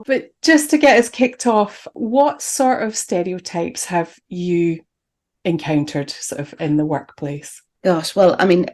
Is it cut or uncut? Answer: uncut